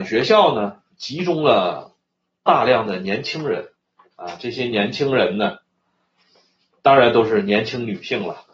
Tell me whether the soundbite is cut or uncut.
uncut